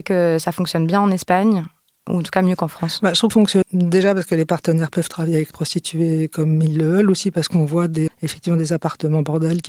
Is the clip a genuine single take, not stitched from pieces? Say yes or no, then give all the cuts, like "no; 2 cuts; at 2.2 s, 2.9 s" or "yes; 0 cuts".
no; 4 cuts; at 3.3 s, 3.6 s, 5.5 s, 8.1 s